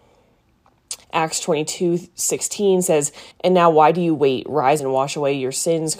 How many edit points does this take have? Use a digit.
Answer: 3